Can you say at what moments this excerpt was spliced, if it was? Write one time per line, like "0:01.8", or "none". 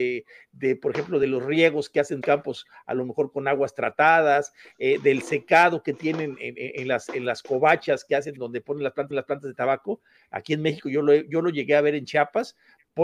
0:02.2
0:09.1